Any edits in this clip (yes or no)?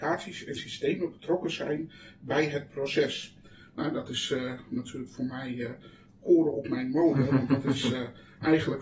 no